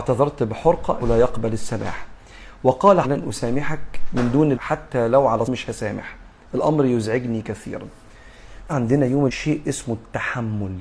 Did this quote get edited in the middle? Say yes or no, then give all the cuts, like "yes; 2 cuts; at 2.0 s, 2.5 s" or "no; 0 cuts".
yes; 6 cuts; at 1.0 s, 3.0 s, 4.5 s, 5.4 s, 8.7 s, 9.3 s